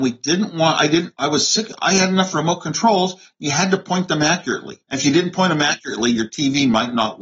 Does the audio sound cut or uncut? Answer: cut